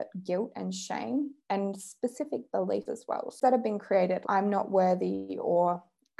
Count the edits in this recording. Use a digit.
4